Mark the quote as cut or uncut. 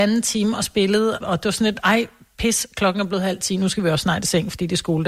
cut